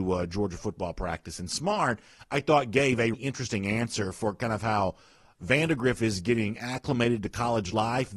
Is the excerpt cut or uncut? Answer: cut